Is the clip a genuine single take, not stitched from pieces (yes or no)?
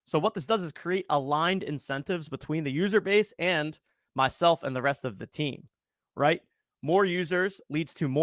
yes